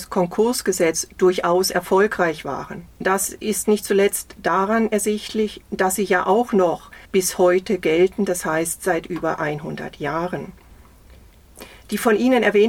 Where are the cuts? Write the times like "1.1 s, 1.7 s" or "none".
2.9 s, 7.0 s